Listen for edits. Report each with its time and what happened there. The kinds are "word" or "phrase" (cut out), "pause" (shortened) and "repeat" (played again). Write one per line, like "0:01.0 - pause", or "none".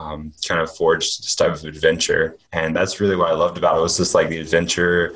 0:02.5 - pause